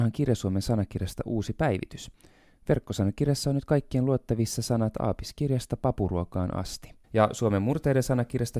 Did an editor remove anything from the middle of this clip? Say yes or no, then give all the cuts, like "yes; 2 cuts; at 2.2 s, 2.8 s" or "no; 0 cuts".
yes; 1 cut; at 7.0 s